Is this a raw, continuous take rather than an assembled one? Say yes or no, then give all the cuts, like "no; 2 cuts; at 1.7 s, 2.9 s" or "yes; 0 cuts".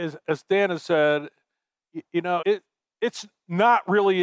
no; 1 cut; at 2.4 s